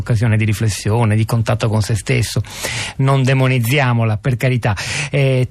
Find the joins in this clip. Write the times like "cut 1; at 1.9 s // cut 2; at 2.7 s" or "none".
none

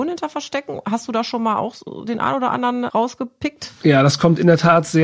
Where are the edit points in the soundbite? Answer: cut 1; at 2.9 s

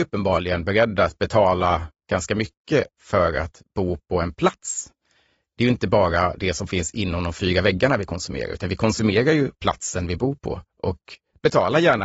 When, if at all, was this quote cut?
none

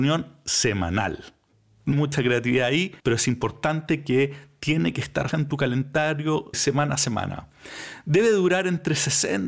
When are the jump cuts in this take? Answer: cut 1; at 1.9 s // cut 2; at 3.0 s // cut 3; at 5.3 s // cut 4; at 6.5 s

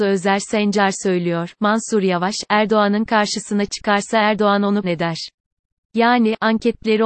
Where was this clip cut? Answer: cut 1; at 4.8 s

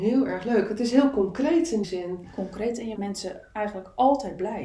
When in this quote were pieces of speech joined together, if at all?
cut 1; at 1.8 s // cut 2; at 3.0 s

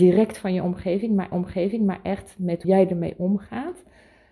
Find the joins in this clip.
cut 1; at 1.3 s // cut 2; at 2.6 s

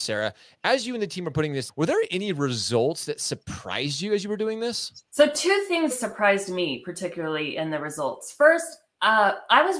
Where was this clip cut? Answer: cut 1; at 1.7 s // cut 2; at 5.1 s // cut 3; at 5.9 s

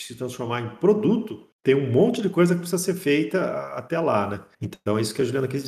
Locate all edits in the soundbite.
cut 1; at 1.5 s // cut 2; at 4.5 s

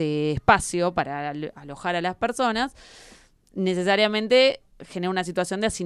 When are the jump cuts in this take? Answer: none

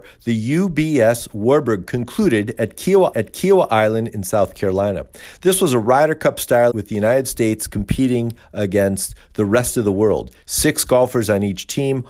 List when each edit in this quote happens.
cut 1; at 1.9 s // cut 2; at 3.1 s // cut 3; at 6.7 s

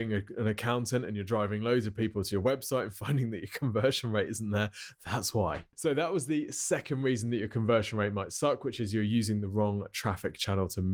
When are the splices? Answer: none

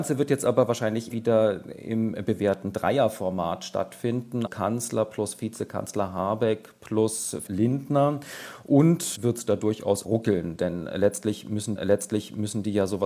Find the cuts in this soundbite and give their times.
cut 1; at 1.1 s // cut 2; at 4.5 s // cut 3; at 7.5 s // cut 4; at 9.1 s // cut 5; at 10.0 s // cut 6; at 11.8 s

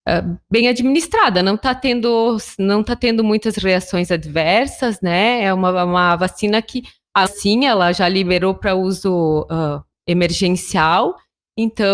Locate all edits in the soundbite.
cut 1; at 7.3 s

